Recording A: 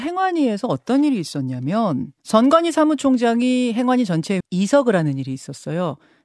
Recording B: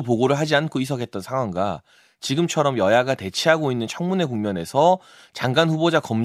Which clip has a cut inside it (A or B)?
A